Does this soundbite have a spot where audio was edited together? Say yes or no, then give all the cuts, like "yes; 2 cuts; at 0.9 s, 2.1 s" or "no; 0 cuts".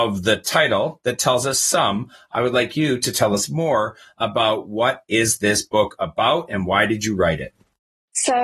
no; 0 cuts